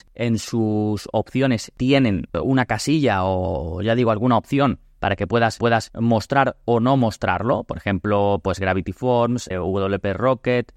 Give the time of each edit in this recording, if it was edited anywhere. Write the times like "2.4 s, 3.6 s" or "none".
5.6 s, 9.5 s